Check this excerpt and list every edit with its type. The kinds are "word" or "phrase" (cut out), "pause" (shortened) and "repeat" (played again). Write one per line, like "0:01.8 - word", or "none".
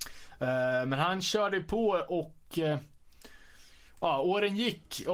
none